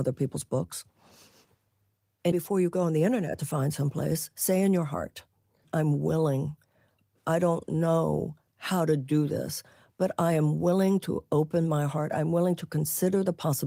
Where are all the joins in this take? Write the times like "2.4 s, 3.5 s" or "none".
2.3 s

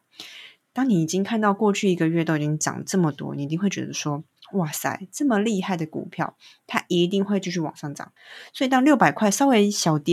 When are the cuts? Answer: 8.2 s

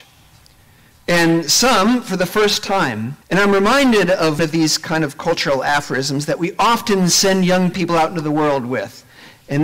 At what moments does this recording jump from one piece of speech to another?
3.2 s, 4.4 s

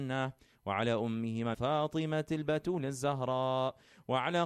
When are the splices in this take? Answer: 1.5 s

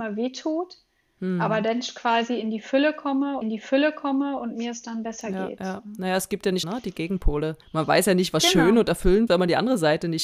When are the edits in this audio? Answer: 3.4 s, 6.6 s, 7.6 s, 9.3 s

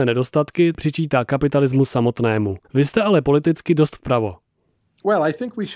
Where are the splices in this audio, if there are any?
2.6 s

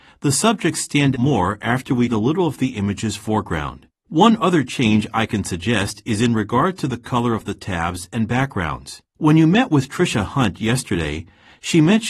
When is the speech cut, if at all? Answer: 1.1 s, 2.1 s, 4.0 s, 9.1 s

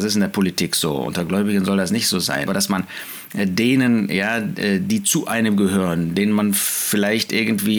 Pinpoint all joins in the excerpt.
2.5 s

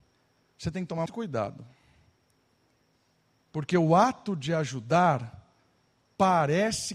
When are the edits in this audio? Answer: 1.1 s

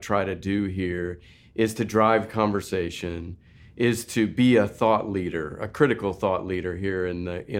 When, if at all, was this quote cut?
none

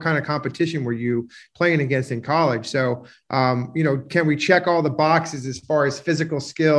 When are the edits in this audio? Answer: none

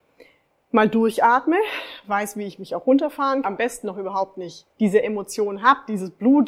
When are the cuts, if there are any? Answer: 3.4 s, 4.7 s

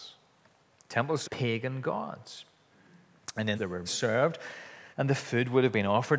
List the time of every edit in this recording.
1.2 s, 3.5 s, 3.8 s, 4.9 s

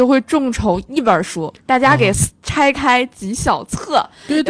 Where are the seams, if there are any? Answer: 1.6 s

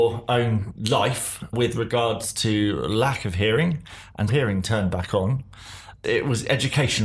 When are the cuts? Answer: 4.3 s

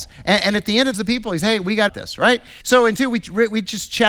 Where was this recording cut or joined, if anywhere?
0.9 s, 1.4 s, 1.9 s, 2.6 s, 3.0 s

